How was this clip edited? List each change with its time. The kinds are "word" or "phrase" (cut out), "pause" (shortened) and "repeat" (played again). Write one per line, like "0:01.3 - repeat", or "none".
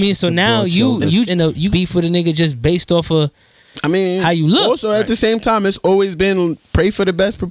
0:01.3 - word
0:01.7 - word